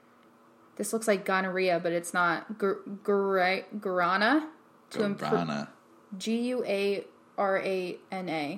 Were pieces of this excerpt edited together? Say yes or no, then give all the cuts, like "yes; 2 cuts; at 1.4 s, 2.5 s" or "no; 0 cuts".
no; 0 cuts